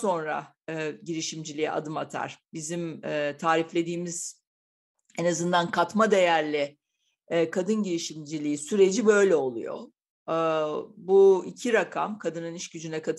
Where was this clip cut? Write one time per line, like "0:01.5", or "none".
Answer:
none

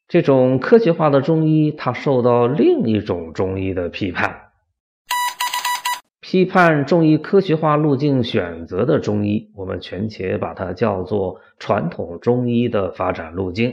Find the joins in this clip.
0:06.1

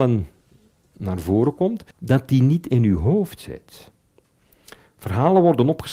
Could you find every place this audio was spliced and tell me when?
0:01.9

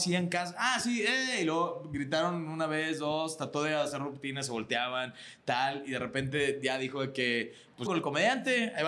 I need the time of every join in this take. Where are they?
0:07.9

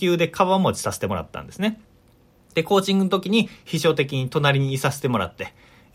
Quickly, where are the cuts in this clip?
none

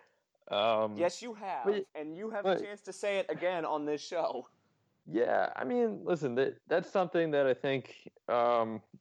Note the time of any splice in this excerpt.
0:01.9
0:06.6

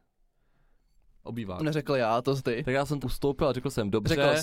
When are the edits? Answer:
0:01.2
0:01.6
0:02.4
0:03.0

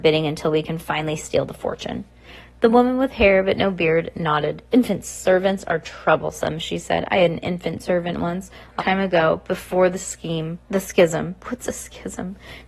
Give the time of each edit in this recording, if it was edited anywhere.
0:08.8
0:10.6
0:11.4

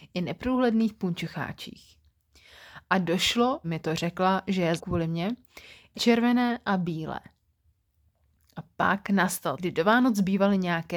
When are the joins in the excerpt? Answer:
0:03.6
0:04.8
0:05.9
0:09.6

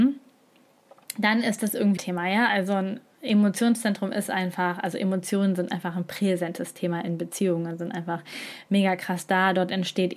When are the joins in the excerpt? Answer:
0:02.0

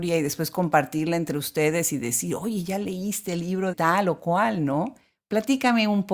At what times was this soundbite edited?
0:03.7

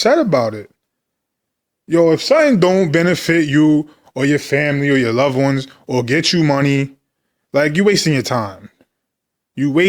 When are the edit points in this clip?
none

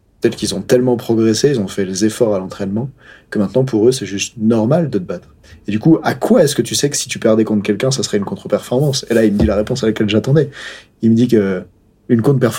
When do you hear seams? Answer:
none

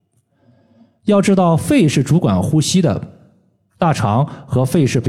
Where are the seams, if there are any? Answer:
none

